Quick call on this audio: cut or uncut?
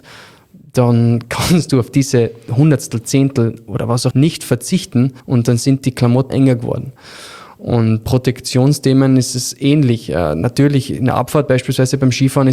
cut